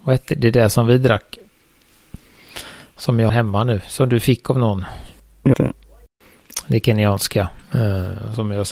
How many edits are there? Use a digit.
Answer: 2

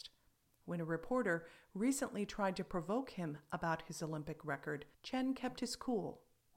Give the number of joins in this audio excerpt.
1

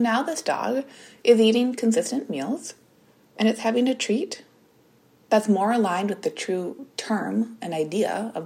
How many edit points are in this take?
0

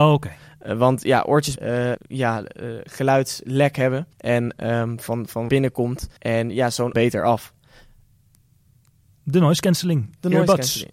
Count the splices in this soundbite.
6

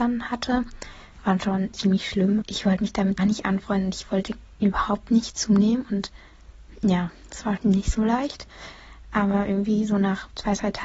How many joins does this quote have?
4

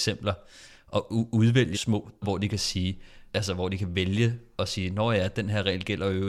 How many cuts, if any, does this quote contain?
3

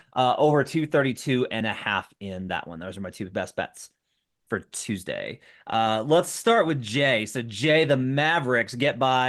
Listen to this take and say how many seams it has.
0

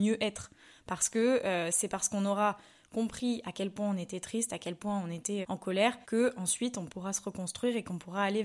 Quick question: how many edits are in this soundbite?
2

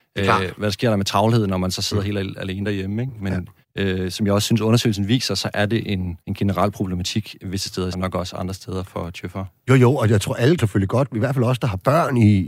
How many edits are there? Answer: 4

